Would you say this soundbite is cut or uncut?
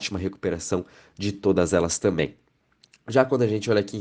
uncut